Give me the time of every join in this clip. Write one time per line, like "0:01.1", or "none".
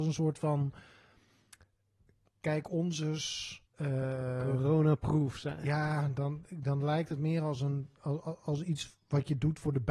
0:03.7